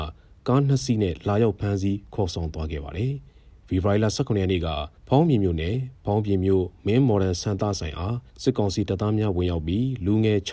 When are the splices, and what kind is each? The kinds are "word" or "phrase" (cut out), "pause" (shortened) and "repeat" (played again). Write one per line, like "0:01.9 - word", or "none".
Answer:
0:03.3 - pause
0:05.0 - pause
0:08.3 - pause